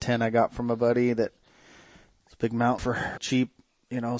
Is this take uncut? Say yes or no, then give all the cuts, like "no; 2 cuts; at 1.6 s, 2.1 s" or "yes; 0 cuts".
no; 2 cuts; at 2.8 s, 3.2 s